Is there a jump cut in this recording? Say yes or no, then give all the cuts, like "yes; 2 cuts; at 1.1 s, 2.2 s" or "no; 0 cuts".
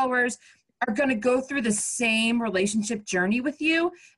no; 0 cuts